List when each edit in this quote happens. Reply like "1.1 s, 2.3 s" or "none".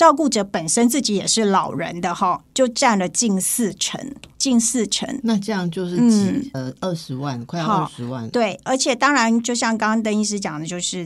4.3 s, 6.5 s